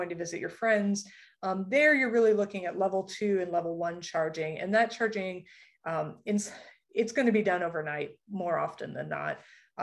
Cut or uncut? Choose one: uncut